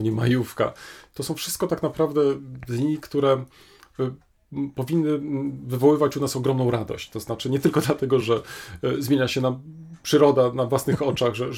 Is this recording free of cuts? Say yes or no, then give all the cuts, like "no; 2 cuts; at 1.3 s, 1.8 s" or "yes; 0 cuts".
yes; 0 cuts